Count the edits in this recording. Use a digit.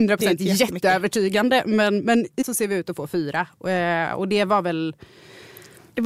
1